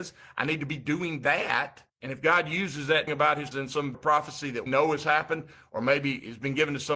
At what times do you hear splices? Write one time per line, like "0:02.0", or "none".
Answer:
0:01.9
0:03.1
0:03.5
0:03.9
0:04.7